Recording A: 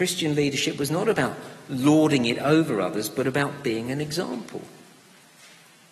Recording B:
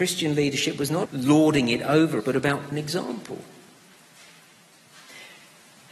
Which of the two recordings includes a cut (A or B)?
B